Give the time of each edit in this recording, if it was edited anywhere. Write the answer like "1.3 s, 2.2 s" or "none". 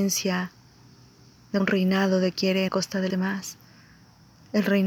1.6 s, 2.3 s, 2.7 s, 3.1 s